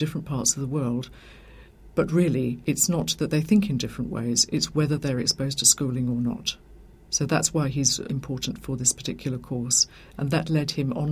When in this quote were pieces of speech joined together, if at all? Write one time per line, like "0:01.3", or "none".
none